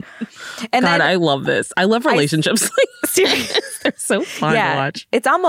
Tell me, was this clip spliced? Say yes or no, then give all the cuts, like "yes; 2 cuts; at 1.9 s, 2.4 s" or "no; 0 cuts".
no; 0 cuts